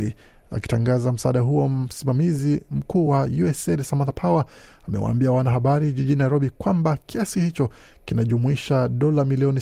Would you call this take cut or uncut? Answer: uncut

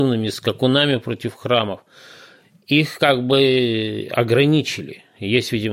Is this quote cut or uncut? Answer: uncut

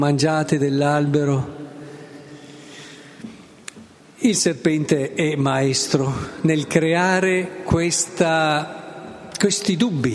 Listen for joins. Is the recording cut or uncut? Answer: uncut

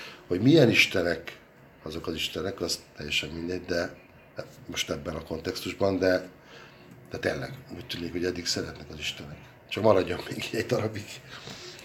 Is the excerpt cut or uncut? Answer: uncut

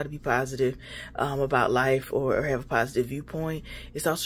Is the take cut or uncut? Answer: uncut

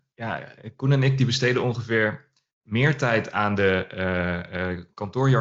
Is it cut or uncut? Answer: uncut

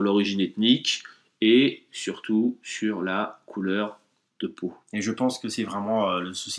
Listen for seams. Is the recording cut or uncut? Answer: uncut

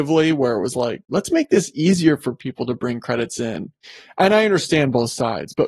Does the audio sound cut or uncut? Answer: uncut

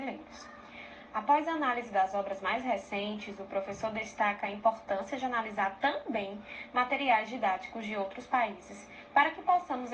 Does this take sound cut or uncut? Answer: uncut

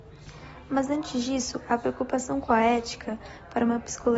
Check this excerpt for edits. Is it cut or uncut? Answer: uncut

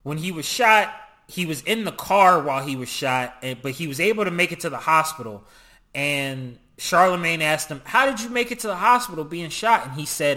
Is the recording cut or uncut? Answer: uncut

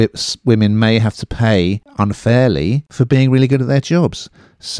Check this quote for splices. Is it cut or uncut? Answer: uncut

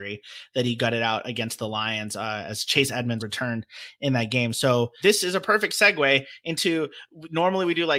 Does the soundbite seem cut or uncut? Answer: cut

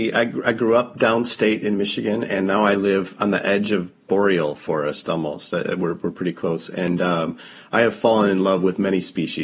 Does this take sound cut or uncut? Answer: uncut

